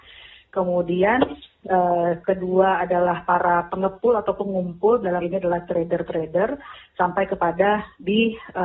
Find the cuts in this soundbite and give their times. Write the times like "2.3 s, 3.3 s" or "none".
5.2 s